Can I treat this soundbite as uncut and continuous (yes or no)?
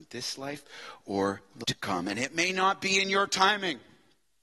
no